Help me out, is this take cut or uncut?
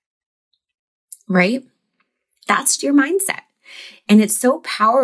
cut